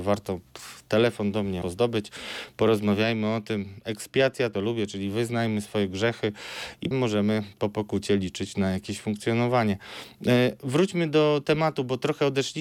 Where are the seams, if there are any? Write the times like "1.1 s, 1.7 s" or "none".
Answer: 1.6 s, 4.5 s, 6.9 s